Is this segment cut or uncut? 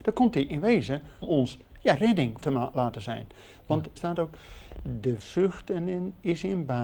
cut